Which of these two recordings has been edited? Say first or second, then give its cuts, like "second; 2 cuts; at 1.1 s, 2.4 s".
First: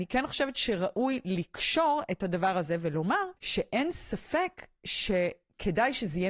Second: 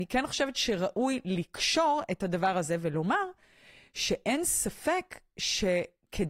first; 1 cut; at 3.4 s